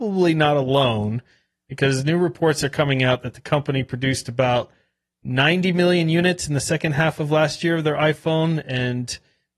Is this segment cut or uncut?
uncut